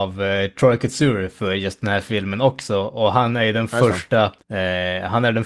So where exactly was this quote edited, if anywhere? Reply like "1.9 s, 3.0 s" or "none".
4.4 s